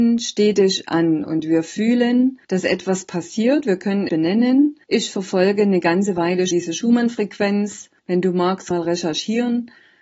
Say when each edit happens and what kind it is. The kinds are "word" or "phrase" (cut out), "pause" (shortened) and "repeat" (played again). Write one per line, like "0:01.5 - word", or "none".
0:02.4 - pause
0:04.1 - phrase
0:04.8 - pause
0:06.5 - word
0:08.0 - pause
0:08.7 - phrase